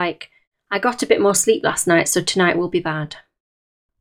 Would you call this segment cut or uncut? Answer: uncut